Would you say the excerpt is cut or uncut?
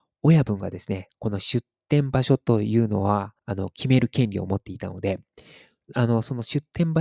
cut